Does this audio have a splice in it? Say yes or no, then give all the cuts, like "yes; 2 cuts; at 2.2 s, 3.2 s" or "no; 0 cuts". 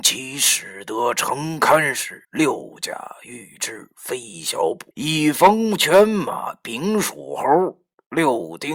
yes; 2 cuts; at 2.2 s, 4.9 s